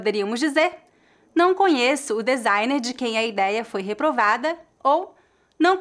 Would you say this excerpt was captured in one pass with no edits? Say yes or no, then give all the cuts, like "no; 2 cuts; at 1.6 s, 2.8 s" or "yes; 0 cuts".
yes; 0 cuts